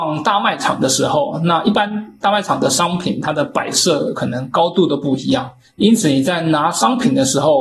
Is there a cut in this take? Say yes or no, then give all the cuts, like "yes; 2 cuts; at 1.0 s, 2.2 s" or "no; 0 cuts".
no; 0 cuts